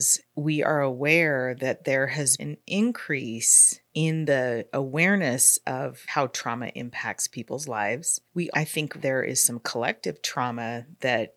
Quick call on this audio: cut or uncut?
cut